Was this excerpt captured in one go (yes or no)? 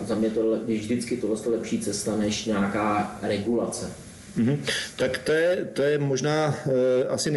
yes